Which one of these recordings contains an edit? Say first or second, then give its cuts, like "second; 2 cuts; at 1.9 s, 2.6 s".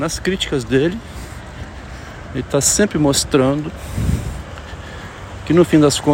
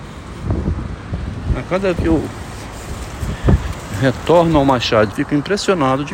second; 2 cuts; at 2.0 s, 5.1 s